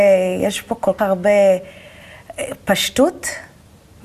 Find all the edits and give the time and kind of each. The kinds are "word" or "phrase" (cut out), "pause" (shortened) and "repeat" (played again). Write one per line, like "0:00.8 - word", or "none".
0:01.0 - word